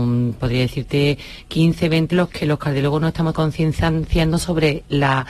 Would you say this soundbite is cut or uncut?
cut